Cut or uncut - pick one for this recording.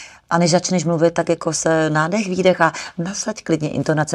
uncut